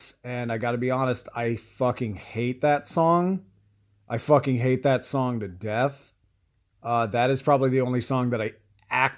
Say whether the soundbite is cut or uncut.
uncut